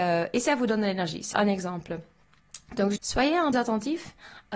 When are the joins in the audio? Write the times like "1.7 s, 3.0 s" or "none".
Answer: 1.3 s, 3.0 s, 3.5 s